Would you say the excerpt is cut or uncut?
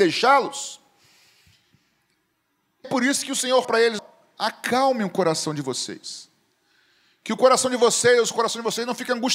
cut